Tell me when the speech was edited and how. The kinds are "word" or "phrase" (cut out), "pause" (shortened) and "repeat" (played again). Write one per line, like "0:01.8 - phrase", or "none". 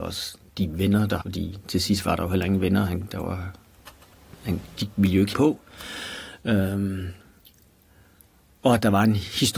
0:01.2 - word
0:05.3 - word